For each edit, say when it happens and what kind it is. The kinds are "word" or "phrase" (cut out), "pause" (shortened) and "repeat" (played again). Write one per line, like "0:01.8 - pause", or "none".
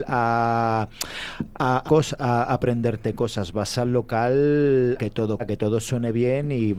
0:01.9 - word
0:05.0 - word
0:05.4 - word